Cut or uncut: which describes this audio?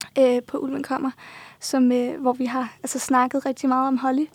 uncut